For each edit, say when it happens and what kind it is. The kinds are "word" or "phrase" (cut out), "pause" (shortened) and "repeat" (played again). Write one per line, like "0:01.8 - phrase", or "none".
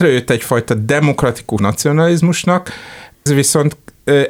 0:01.6 - phrase
0:03.3 - word